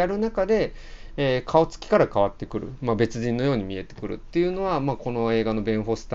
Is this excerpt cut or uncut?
uncut